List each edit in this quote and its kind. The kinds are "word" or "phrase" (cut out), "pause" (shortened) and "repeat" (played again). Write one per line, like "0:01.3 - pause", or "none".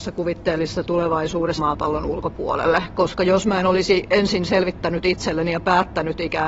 0:01.6 - word